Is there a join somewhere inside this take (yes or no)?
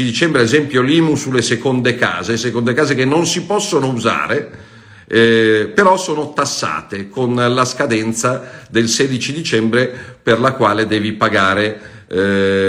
no